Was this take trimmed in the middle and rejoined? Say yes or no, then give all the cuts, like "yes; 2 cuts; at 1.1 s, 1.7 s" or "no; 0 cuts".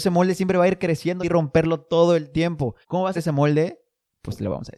yes; 3 cuts; at 1.2 s, 2.8 s, 3.1 s